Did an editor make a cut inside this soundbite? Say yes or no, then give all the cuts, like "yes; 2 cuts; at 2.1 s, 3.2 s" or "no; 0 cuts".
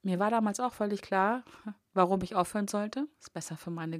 no; 0 cuts